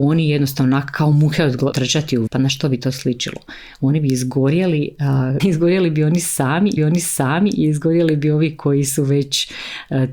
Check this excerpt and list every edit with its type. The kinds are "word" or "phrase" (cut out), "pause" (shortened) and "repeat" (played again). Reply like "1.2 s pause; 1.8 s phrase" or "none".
1.7 s phrase; 2.3 s word; 5.4 s word; 6.8 s repeat